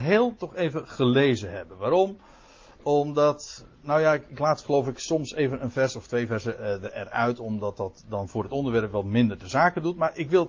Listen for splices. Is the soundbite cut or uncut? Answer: uncut